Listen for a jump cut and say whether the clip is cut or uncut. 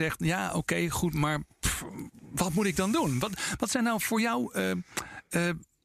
uncut